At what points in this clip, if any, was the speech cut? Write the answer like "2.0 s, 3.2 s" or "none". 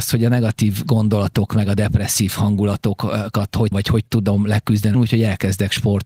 3.7 s, 4.9 s